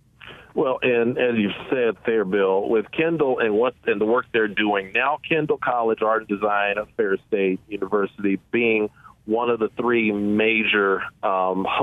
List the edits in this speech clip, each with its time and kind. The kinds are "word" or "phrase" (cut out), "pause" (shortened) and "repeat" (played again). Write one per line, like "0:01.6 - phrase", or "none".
none